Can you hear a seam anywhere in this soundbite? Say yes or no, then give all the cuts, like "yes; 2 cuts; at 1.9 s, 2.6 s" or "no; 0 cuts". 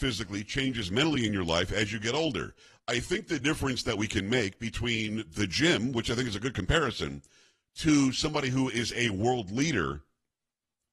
no; 0 cuts